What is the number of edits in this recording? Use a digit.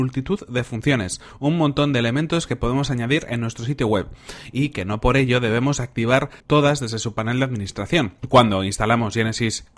2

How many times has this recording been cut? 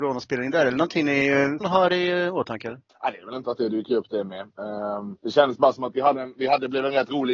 4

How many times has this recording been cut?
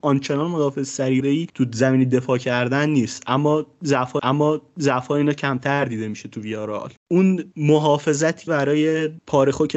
4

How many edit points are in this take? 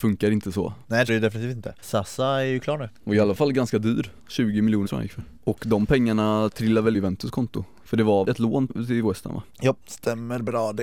7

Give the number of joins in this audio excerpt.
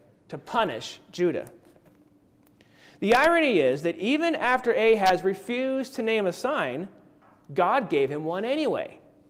0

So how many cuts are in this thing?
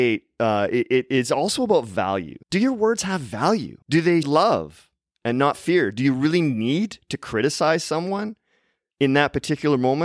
3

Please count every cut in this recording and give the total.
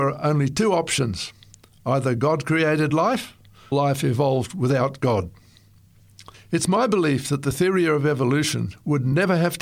2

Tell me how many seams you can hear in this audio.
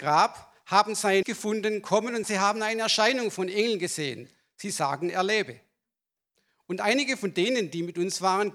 2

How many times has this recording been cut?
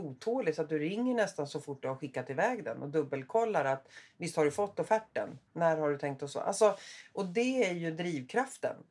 1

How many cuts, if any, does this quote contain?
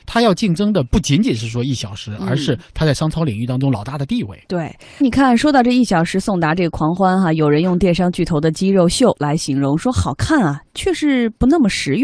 1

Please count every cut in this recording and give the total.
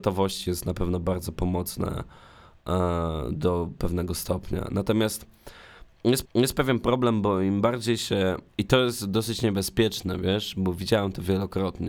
2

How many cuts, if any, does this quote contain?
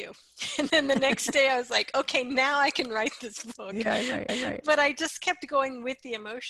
1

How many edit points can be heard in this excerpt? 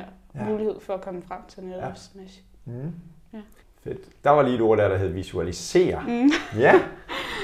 1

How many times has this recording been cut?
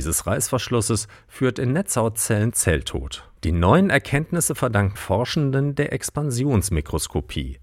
2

